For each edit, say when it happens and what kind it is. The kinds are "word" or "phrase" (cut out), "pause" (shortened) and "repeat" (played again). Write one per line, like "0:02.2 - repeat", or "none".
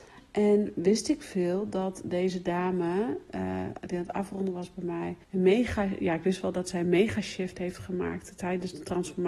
0:05.2 - pause